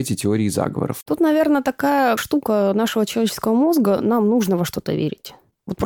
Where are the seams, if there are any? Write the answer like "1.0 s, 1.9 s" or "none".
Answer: none